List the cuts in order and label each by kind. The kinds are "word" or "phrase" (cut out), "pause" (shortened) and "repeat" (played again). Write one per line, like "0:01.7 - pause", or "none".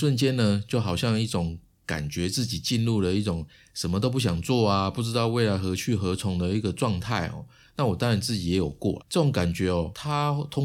0:09.0 - word